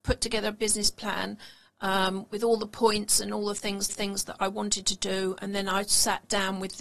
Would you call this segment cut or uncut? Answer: cut